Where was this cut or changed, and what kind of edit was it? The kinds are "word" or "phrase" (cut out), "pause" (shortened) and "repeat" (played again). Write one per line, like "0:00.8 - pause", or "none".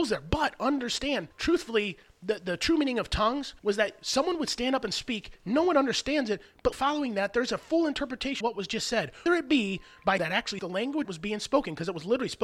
0:01.3 - pause
0:03.6 - pause
0:06.7 - word
0:08.4 - word
0:09.3 - word
0:10.2 - phrase
0:10.6 - word
0:11.0 - word

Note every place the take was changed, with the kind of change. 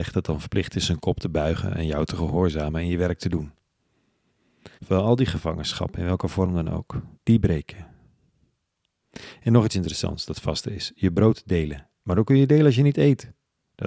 0:04.8 - pause
0:07.1 - pause

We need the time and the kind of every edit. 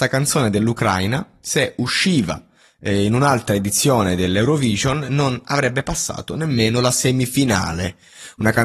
none

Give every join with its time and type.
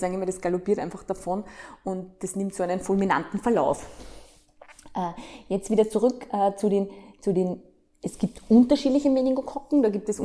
none

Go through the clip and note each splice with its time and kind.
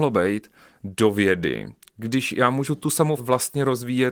0:03.2 - word

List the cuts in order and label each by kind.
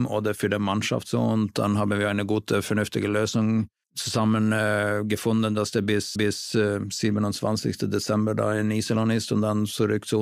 0:06.2 - repeat

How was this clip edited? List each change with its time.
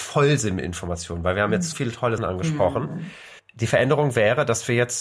0:01.7 - word
0:02.2 - word
0:03.4 - pause

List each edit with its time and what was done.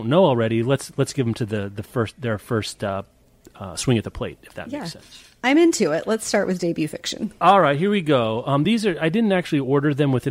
none

